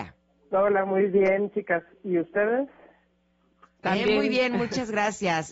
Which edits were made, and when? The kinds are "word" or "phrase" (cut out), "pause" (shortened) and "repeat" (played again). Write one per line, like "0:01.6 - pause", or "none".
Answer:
none